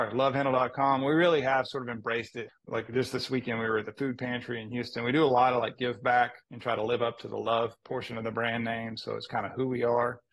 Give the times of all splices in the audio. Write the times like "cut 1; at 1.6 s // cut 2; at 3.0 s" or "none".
cut 1; at 2.6 s // cut 2; at 6.4 s